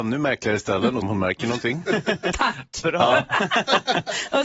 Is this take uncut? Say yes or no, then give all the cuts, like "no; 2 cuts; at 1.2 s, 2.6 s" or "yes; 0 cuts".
no; 1 cut; at 1.0 s